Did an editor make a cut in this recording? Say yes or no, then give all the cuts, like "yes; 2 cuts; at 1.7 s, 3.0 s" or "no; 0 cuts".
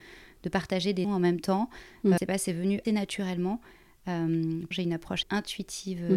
yes; 5 cuts; at 1.0 s, 2.2 s, 2.8 s, 4.7 s, 5.2 s